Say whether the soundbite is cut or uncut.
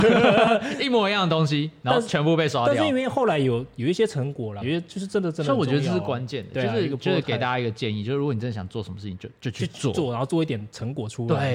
cut